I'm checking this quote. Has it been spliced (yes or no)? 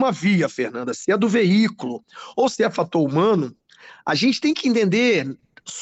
no